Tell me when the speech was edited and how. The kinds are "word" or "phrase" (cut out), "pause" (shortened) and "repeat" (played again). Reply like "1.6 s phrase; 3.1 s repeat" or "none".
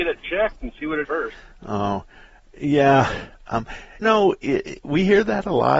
1.0 s word; 4.0 s word